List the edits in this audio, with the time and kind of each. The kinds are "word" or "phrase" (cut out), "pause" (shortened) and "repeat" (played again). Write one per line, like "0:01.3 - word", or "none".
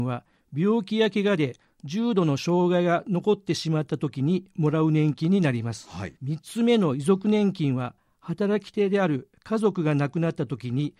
0:06.2 - pause